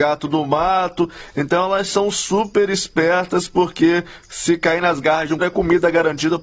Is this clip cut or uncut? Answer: cut